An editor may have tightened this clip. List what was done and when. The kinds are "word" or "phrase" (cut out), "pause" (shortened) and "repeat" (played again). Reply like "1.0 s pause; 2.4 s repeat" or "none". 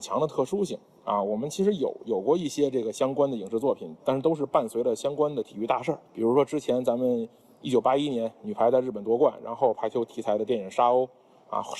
6.1 s pause